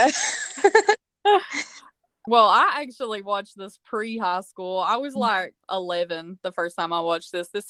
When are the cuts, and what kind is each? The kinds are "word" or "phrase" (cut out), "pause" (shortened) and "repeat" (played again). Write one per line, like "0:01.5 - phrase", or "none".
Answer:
0:02.3 - word
0:05.6 - word